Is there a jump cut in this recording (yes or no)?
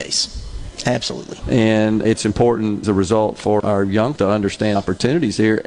yes